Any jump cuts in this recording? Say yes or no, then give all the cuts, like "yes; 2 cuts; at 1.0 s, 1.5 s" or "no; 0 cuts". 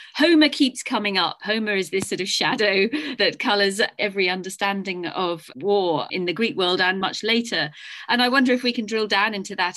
no; 0 cuts